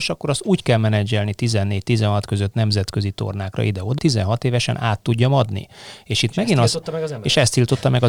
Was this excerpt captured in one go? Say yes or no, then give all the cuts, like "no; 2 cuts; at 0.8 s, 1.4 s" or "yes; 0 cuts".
no; 1 cut; at 4.0 s